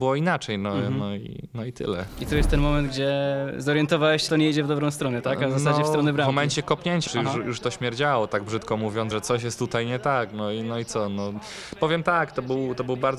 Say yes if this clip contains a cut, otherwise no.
yes